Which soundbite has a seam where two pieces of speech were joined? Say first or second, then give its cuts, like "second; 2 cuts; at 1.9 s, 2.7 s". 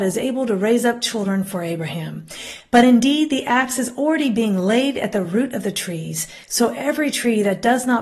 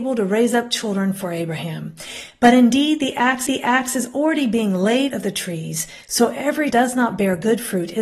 second; 3 cuts; at 3.5 s, 5.1 s, 6.7 s